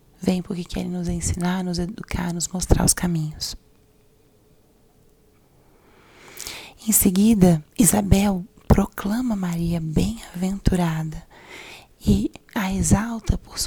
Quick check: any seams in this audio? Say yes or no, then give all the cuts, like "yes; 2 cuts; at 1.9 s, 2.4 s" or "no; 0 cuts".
yes; 1 cut; at 7.7 s